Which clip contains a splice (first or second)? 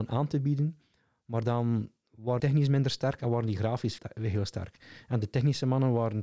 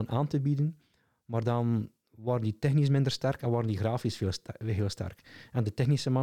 first